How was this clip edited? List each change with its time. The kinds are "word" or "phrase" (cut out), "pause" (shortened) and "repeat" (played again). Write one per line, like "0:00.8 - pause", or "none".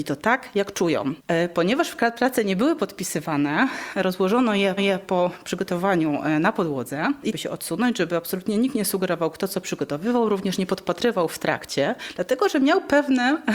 0:04.8 - repeat
0:07.3 - phrase